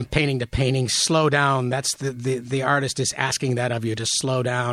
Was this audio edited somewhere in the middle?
no; 0 cuts

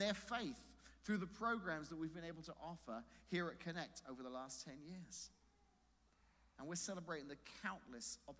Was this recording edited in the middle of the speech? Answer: no; 0 cuts

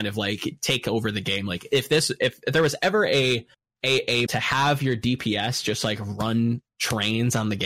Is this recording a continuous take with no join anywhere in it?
no; 2 cuts; at 3.5 s, 4.3 s

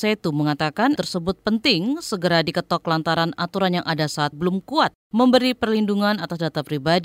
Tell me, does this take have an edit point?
yes; 2 cuts; at 1.0 s, 4.3 s

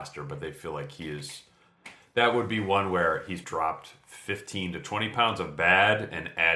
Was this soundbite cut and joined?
yes; 1 cut; at 3.4 s

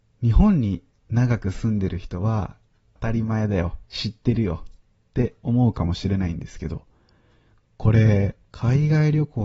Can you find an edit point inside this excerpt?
yes; 2 cuts; at 3.0 s, 8.4 s

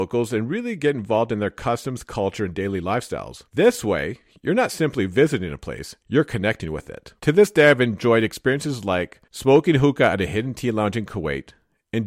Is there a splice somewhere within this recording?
yes; 4 cuts; at 3.5 s, 6.0 s, 7.2 s, 9.3 s

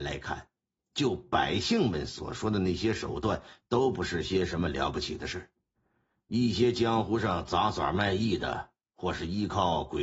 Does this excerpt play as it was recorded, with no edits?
yes; 0 cuts

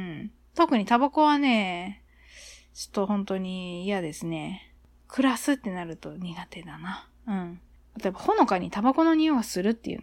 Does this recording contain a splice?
no; 0 cuts

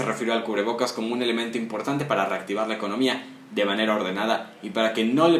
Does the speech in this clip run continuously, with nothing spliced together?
yes; 0 cuts

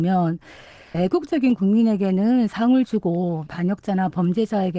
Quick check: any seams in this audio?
yes; 2 cuts; at 0.9 s, 3.5 s

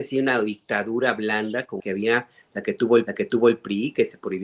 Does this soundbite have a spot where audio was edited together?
yes; 2 cuts; at 1.8 s, 3.1 s

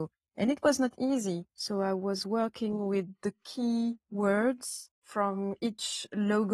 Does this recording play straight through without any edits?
no; 2 cuts; at 1.5 s, 5.0 s

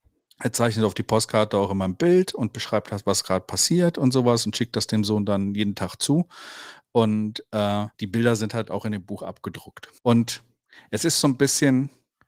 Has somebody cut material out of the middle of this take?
yes; 2 cuts; at 7.9 s, 10.0 s

